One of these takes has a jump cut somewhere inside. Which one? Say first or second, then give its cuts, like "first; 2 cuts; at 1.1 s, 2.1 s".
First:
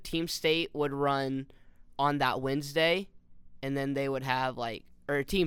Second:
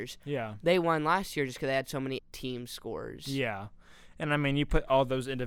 second; 1 cut; at 2.2 s